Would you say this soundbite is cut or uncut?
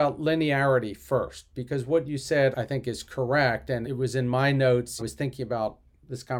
cut